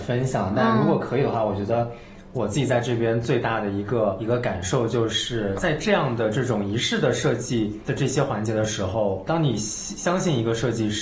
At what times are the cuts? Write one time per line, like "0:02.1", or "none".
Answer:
0:09.3

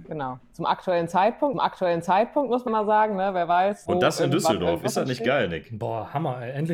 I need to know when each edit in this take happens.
0:01.5
0:02.7
0:03.9

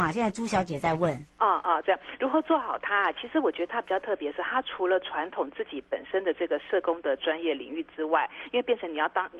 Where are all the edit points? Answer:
0:01.3

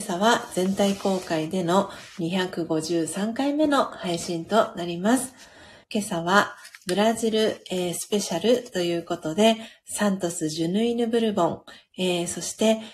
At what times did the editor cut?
0:05.8

